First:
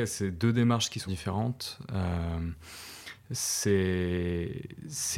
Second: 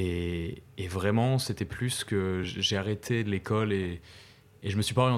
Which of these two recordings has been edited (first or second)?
first